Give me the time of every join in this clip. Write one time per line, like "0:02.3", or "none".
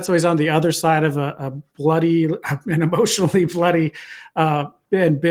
0:01.7